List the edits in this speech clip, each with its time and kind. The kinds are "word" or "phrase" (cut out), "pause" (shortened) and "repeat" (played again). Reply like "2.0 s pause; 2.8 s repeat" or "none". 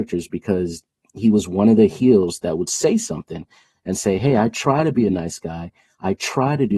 none